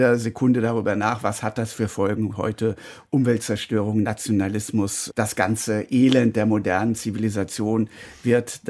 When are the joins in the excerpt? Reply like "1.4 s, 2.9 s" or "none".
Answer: 5.1 s